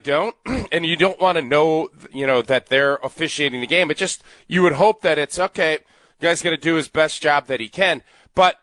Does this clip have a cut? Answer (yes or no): no